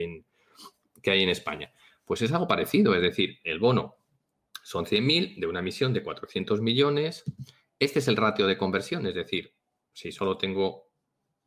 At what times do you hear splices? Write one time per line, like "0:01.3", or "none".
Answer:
none